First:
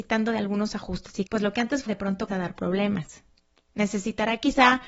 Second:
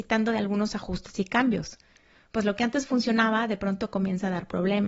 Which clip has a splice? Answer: first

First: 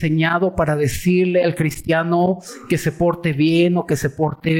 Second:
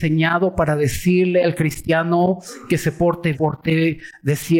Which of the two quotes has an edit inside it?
second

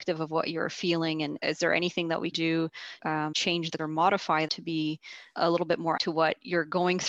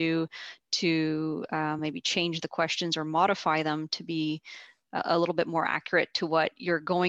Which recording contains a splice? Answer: first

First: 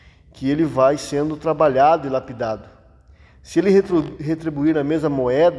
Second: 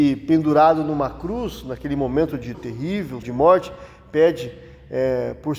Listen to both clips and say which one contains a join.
second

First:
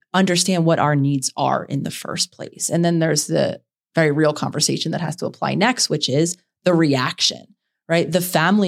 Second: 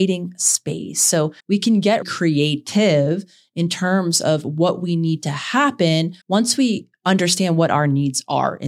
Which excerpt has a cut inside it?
second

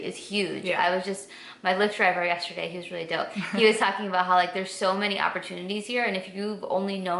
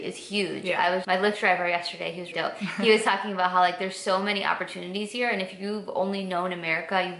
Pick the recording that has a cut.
second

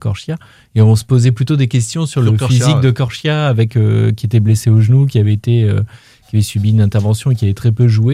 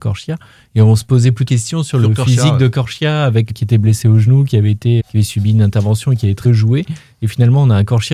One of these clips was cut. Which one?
second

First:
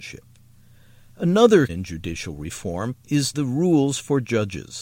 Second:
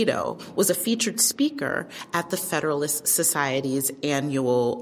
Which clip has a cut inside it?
first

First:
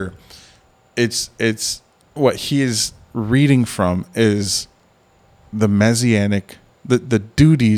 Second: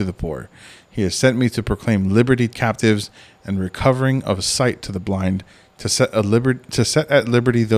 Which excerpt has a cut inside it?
second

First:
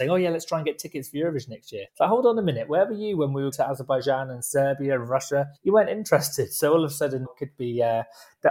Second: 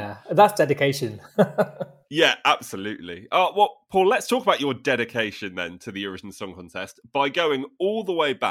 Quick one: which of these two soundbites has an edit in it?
first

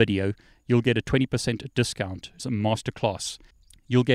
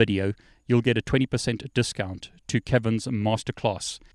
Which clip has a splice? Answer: first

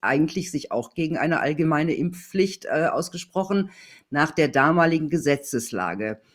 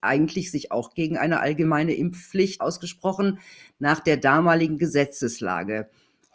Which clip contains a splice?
second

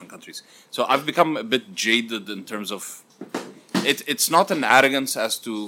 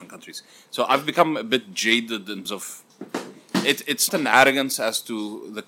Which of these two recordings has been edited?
second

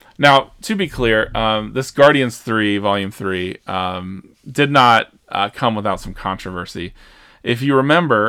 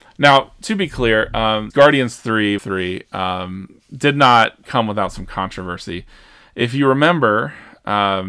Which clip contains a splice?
second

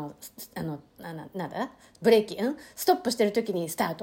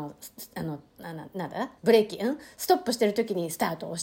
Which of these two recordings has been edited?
second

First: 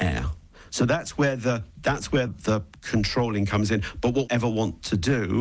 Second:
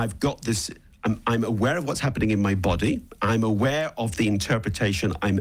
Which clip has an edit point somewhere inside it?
first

